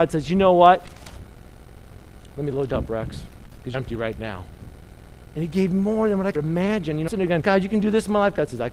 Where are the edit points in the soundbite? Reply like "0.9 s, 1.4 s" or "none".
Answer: 2.7 s, 3.7 s, 6.3 s, 7.1 s, 7.4 s